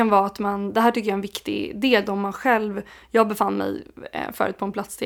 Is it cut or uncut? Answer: uncut